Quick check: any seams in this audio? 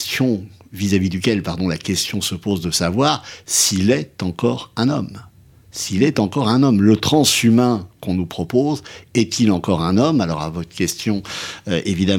no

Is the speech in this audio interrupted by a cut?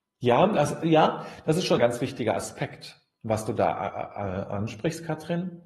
yes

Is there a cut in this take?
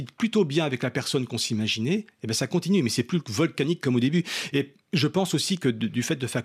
no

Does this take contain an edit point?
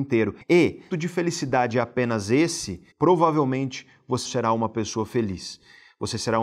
yes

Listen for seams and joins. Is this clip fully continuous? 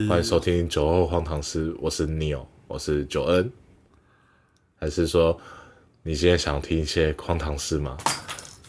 yes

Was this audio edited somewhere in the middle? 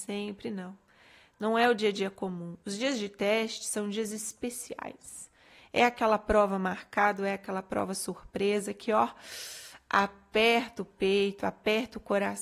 no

